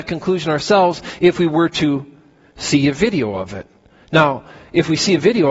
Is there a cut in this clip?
no; 0 cuts

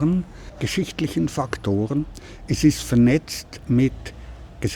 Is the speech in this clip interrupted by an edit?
no; 0 cuts

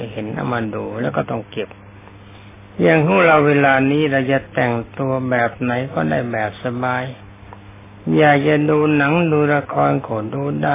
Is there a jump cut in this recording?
no; 0 cuts

